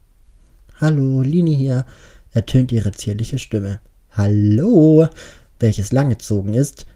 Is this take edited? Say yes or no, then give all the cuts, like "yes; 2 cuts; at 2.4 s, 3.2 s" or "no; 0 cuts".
no; 0 cuts